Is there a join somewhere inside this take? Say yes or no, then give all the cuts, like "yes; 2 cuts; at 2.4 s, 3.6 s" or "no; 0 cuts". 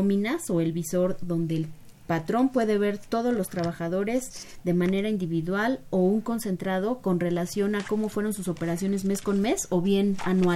no; 0 cuts